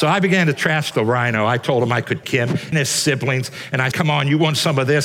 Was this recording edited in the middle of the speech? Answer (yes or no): yes